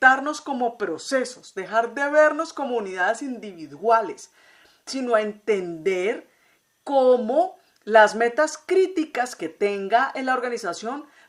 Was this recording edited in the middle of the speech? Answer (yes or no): no